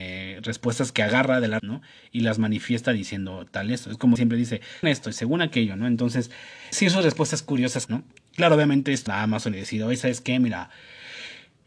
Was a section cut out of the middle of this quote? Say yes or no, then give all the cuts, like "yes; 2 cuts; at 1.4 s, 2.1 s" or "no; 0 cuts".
yes; 7 cuts; at 1.6 s, 4.2 s, 4.8 s, 6.7 s, 7.9 s, 8.2 s, 9.1 s